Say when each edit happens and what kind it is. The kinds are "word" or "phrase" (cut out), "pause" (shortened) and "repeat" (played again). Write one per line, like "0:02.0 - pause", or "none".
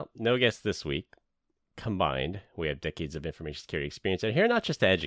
none